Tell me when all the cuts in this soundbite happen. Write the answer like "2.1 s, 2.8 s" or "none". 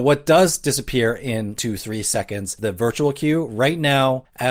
1.6 s, 2.6 s